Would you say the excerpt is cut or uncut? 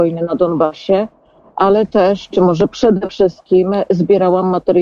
uncut